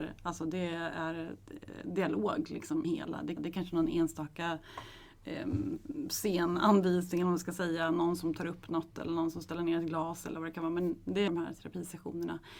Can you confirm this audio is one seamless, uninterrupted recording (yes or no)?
no